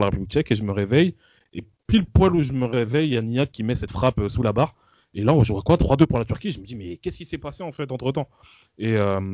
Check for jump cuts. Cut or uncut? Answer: uncut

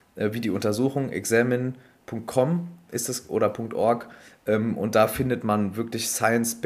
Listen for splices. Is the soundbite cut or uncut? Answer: uncut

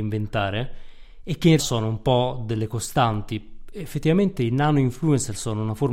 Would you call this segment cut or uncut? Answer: cut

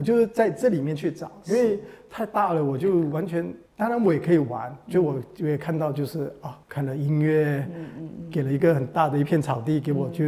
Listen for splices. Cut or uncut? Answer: cut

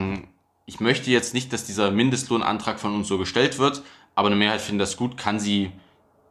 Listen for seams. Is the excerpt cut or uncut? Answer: uncut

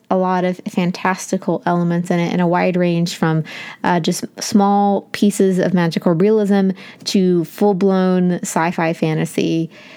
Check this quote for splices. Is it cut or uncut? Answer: uncut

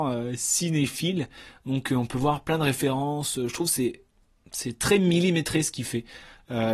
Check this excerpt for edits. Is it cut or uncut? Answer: uncut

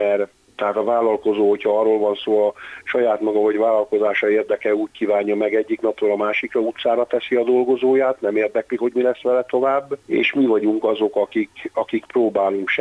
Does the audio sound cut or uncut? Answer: cut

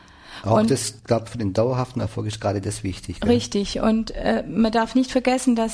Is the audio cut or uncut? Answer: cut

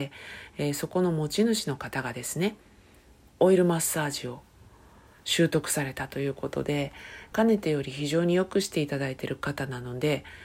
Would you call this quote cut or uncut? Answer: uncut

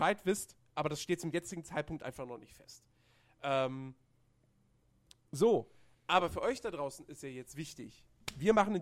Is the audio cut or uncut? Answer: uncut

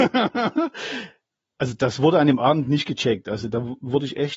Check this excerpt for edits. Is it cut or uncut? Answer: uncut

